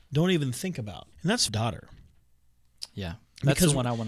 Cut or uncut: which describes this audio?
cut